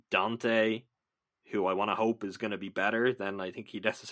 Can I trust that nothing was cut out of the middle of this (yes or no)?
yes